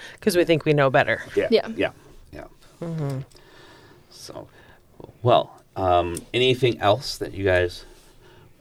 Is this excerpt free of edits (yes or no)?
yes